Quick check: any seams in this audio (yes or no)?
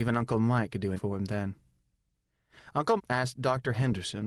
yes